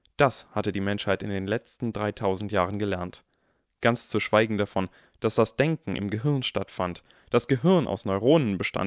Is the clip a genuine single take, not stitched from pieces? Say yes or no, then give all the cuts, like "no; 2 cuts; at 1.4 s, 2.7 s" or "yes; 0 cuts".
yes; 0 cuts